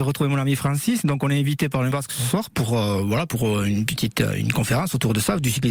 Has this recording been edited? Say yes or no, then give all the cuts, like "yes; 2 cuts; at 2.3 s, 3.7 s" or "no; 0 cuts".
yes; 1 cut; at 1.9 s